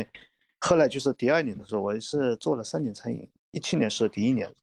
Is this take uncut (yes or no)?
no